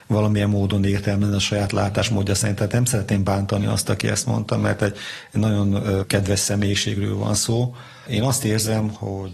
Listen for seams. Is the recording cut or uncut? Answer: uncut